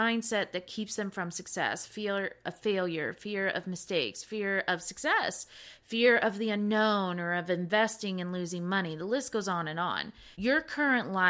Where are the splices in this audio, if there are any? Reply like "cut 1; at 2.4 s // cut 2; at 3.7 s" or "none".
cut 1; at 10.3 s